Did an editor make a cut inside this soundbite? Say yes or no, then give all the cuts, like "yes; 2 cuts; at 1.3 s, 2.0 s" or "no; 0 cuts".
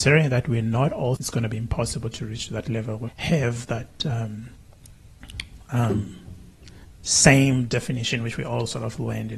yes; 2 cuts; at 1.2 s, 3.1 s